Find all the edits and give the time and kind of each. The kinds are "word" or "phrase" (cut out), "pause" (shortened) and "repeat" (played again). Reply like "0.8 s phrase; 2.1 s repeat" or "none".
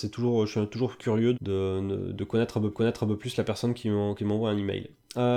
1.3 s word; 2.1 s word; 2.7 s repeat

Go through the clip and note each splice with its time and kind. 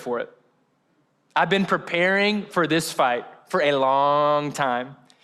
none

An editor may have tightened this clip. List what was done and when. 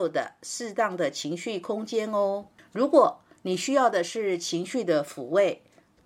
none

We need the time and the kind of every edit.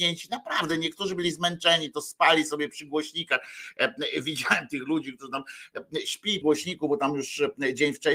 6.4 s word

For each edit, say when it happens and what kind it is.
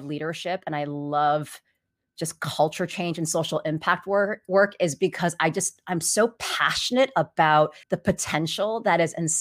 7.8 s pause

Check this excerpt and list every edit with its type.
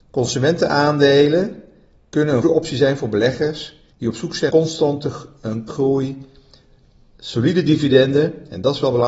2.4 s word; 3.9 s pause; 4.5 s word; 5.7 s word

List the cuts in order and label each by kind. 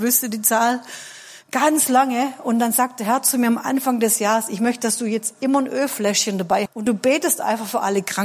6.7 s word

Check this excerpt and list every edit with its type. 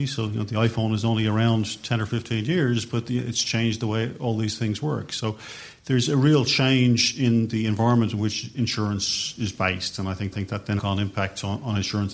10.3 s repeat; 10.8 s phrase

